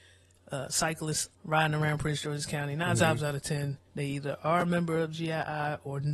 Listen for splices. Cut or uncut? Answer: cut